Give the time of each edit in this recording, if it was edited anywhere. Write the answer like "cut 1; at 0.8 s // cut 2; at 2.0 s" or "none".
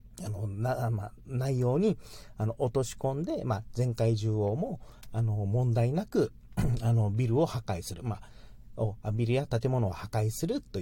none